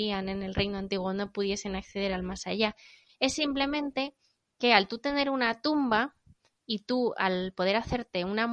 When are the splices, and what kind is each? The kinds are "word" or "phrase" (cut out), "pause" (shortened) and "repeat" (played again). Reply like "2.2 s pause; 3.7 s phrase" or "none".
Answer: none